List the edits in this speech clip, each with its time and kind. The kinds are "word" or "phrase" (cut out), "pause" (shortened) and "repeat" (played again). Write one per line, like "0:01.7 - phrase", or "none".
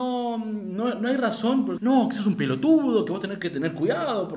0:01.8 - word

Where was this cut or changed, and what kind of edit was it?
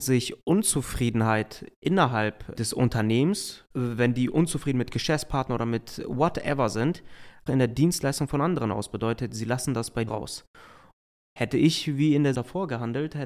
0:03.7 - pause
0:07.5 - word
0:10.1 - word
0:12.3 - word

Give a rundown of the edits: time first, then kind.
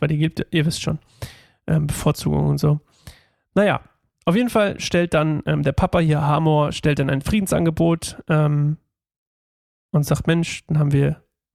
none

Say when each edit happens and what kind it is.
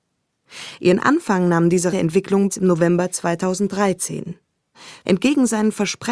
0:01.9 - word
0:02.5 - word

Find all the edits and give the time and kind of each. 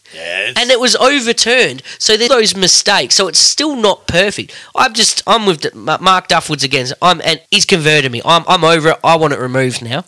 0:02.3 - word
0:07.5 - pause

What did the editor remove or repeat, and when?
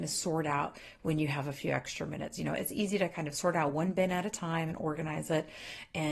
none

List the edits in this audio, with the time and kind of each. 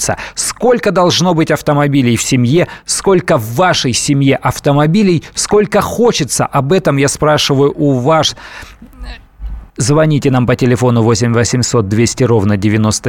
0:09.7 - pause

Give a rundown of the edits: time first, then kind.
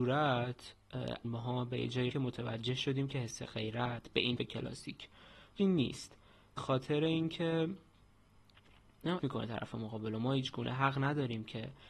0:01.2 - word
0:02.1 - word
0:04.4 - word
0:05.6 - word
0:06.6 - word
0:09.2 - word

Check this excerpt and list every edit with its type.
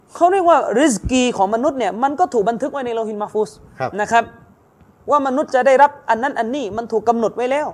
none

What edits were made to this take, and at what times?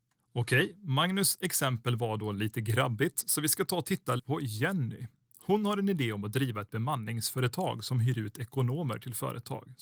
0:04.2 - word

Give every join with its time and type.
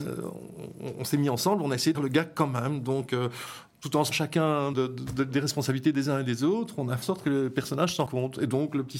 0:01.9 - word
0:04.1 - word
0:04.7 - word
0:07.0 - word
0:08.1 - word

